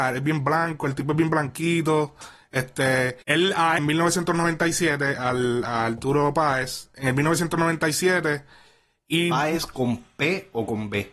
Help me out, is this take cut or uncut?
cut